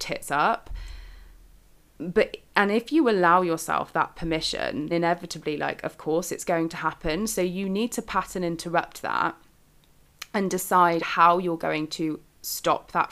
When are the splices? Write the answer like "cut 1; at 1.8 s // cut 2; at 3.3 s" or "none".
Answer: cut 1; at 4.9 s // cut 2; at 11.0 s